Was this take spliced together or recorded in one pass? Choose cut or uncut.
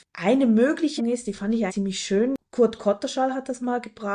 cut